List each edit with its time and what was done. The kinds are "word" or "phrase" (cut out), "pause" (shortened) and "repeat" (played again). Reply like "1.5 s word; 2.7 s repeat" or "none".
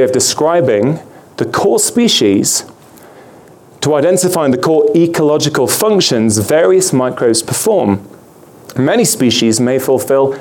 none